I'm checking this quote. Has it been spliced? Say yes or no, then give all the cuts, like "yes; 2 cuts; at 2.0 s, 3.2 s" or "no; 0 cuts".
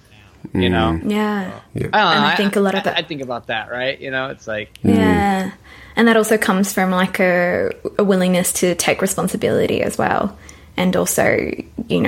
no; 0 cuts